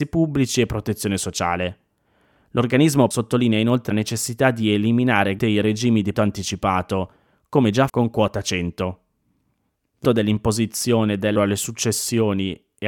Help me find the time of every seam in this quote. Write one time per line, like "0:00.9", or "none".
0:03.1
0:03.9
0:05.4
0:06.1
0:07.9
0:10.0
0:11.4